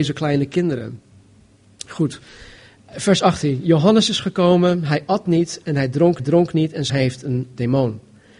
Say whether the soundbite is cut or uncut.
cut